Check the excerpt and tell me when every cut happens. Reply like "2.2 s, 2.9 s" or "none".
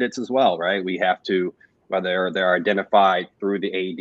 1.8 s